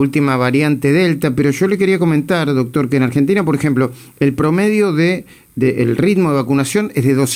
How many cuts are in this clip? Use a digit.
0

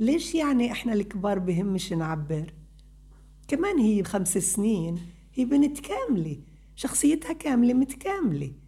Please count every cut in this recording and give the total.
1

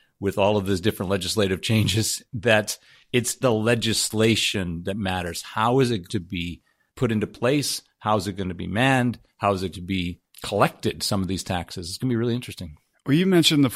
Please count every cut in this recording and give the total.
6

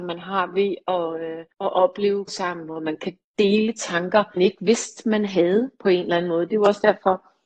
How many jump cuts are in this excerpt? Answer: 3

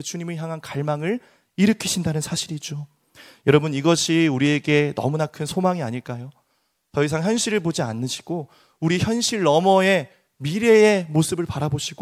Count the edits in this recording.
0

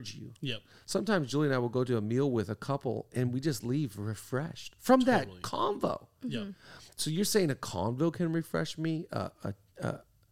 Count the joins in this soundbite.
1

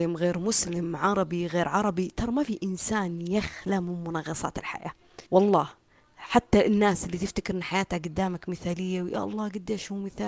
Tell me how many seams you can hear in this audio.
1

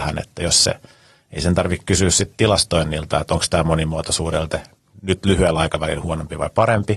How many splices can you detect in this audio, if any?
1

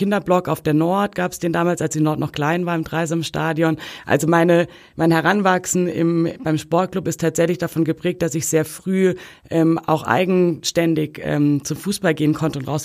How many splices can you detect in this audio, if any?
0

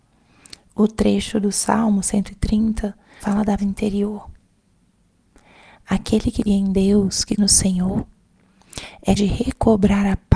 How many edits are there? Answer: 5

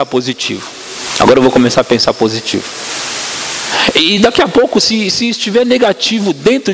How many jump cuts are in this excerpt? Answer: 0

